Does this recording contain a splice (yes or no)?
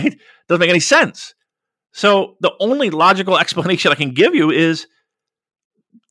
no